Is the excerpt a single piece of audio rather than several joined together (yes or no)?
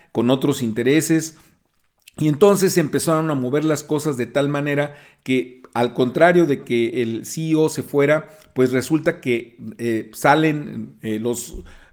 yes